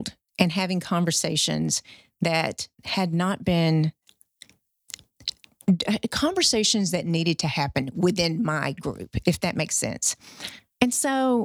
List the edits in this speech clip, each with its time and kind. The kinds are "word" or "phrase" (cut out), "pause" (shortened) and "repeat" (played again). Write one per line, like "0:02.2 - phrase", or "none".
0:02.7 - pause